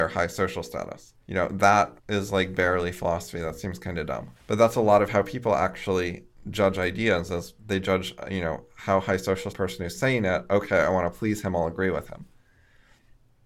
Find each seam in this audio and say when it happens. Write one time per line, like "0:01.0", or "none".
0:01.2
0:02.0
0:04.4
0:09.5